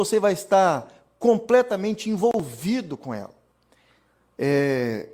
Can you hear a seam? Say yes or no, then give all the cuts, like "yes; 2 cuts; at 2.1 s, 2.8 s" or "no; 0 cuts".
no; 0 cuts